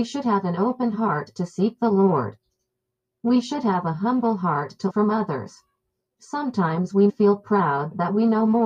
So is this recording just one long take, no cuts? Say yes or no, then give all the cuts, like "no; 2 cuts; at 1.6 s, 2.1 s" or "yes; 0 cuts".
no; 2 cuts; at 4.9 s, 7.1 s